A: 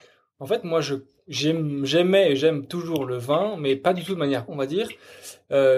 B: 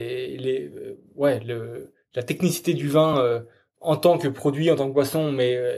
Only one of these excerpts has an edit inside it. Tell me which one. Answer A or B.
A